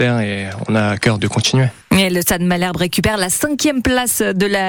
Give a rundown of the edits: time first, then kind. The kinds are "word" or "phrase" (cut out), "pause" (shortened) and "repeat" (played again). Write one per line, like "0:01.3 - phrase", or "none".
0:01.2 - word